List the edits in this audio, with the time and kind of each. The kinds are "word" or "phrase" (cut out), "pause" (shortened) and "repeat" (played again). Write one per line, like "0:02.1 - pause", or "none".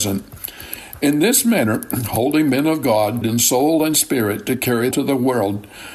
0:03.2 - word
0:04.9 - phrase